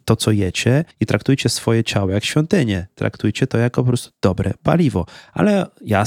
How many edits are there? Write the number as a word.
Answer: one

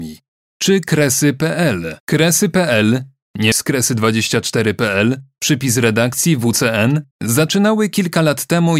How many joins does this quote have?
three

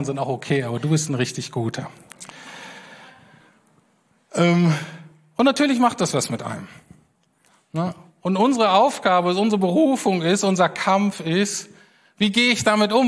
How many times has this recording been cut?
zero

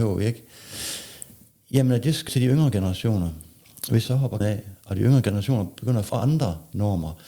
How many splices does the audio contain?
four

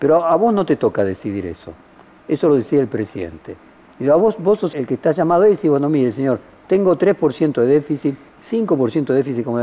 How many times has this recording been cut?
one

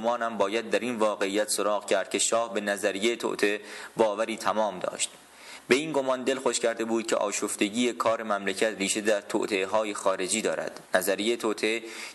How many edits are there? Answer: one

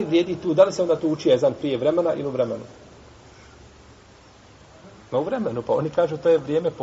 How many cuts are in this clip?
zero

